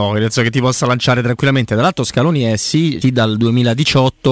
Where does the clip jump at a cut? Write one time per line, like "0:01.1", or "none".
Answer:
0:03.0